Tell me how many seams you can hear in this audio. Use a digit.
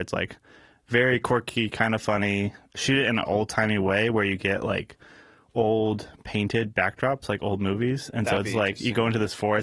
0